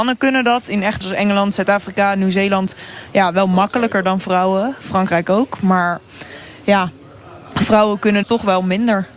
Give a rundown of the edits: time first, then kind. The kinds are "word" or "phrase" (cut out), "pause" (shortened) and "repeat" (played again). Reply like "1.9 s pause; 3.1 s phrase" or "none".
1.0 s word; 8.2 s word